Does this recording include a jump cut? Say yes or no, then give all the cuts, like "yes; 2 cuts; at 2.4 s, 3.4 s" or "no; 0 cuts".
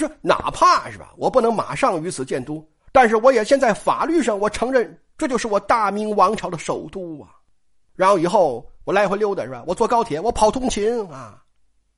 yes; 1 cut; at 2.8 s